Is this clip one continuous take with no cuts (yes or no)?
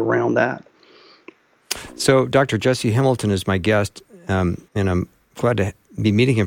no